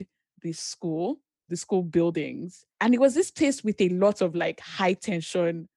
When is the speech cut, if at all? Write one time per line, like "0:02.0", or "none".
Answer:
0:01.5
0:02.7

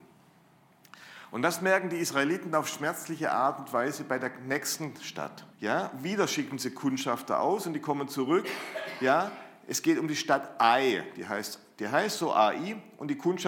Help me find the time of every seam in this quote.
0:05.5

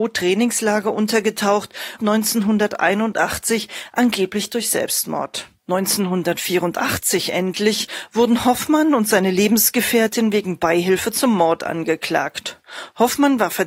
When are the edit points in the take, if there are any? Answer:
0:02.0
0:05.6

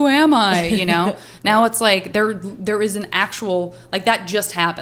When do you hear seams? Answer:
none

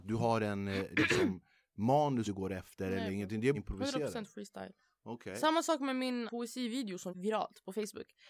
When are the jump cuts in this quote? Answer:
0:02.2
0:03.5
0:06.3
0:07.1

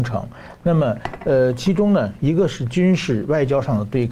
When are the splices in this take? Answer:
none

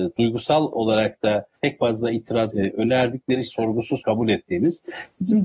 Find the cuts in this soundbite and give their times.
0:01.5
0:02.5
0:03.5
0:04.0

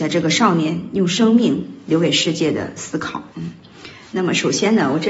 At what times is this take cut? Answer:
0:03.3

